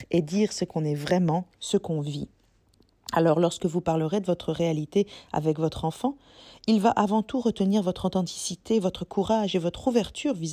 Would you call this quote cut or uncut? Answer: uncut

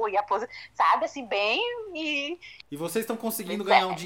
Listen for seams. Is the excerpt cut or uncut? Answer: cut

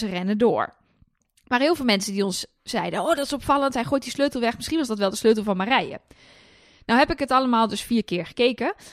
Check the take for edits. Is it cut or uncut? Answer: uncut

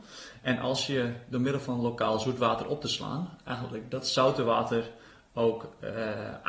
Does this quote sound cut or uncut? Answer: uncut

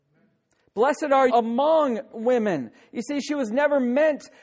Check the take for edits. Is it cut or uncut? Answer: cut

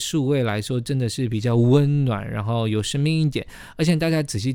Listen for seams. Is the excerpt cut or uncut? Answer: uncut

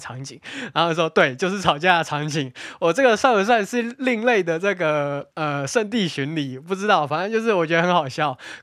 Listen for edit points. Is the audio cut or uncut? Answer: cut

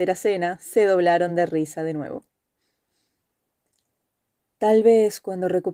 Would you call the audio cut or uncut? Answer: uncut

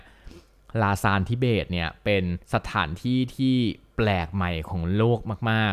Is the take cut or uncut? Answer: cut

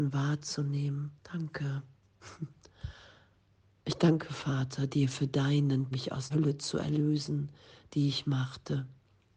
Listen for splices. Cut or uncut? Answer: cut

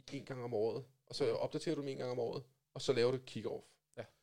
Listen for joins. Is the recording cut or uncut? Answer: uncut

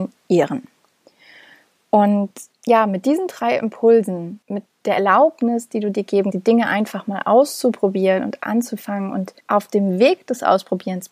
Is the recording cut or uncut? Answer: cut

